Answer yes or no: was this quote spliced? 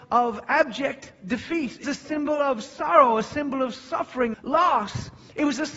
yes